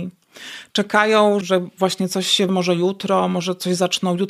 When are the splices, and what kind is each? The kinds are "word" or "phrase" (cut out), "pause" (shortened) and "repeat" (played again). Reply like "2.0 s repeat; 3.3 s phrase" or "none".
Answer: 1.4 s word; 2.5 s word